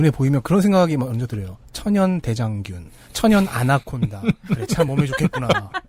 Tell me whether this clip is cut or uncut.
uncut